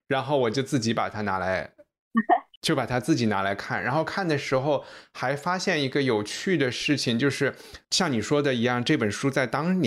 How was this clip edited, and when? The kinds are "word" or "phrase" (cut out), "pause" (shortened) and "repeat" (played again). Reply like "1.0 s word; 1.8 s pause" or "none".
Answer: 7.8 s pause